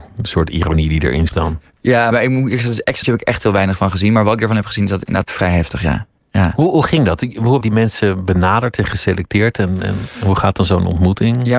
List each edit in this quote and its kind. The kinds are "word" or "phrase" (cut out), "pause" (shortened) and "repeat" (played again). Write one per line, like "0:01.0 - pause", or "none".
0:01.3 - word
0:02.1 - phrase
0:03.0 - word
0:05.2 - word
0:07.6 - word